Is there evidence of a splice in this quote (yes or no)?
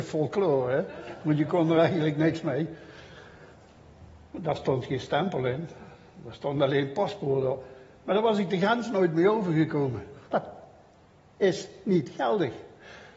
yes